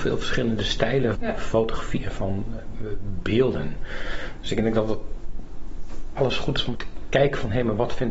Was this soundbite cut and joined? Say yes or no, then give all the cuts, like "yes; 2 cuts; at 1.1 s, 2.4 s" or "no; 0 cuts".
yes; 3 cuts; at 1.1 s, 6.2 s, 6.7 s